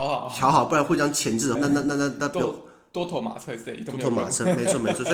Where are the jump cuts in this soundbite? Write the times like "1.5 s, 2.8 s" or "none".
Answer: 1.5 s